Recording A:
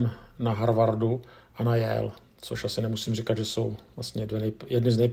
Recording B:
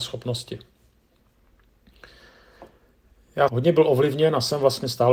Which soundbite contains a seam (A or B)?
B